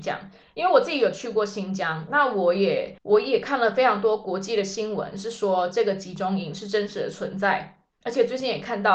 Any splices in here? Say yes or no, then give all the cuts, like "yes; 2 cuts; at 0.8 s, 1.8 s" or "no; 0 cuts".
yes; 1 cut; at 3.0 s